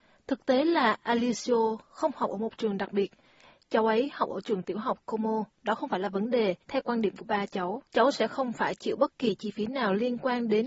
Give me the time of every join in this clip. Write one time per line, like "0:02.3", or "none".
0:05.5
0:06.6
0:07.9